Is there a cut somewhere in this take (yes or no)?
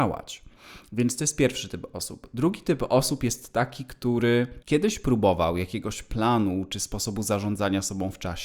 yes